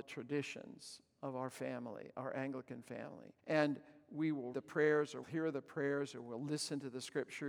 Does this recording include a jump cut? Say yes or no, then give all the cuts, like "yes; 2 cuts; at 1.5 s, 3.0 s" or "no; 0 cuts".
yes; 3 cuts; at 3.4 s, 4.5 s, 5.2 s